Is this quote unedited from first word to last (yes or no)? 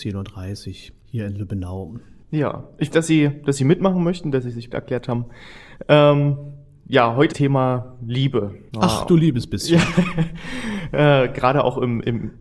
no